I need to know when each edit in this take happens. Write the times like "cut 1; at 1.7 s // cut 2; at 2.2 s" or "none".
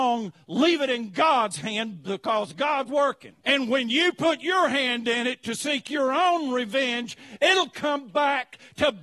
cut 1; at 2.9 s // cut 2; at 3.4 s